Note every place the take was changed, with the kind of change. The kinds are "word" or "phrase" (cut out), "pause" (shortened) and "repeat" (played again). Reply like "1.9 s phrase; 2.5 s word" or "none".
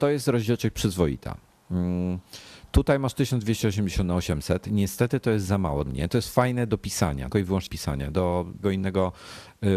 5.9 s word; 7.3 s word; 7.7 s word; 8.6 s word